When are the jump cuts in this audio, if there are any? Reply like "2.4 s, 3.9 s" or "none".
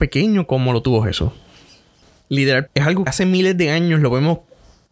2.7 s, 3.1 s